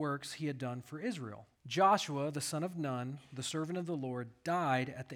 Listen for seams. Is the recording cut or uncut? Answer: cut